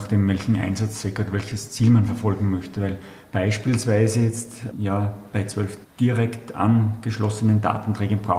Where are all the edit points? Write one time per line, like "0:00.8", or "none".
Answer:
0:04.7